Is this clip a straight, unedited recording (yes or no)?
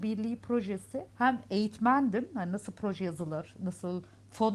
no